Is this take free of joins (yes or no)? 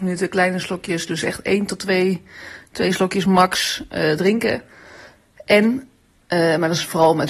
yes